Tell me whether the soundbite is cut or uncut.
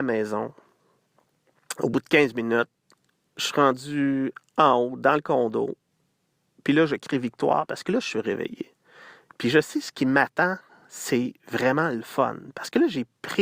uncut